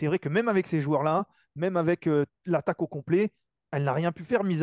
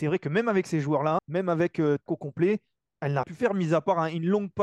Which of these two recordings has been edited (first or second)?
second